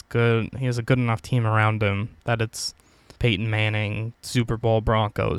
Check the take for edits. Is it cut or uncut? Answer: cut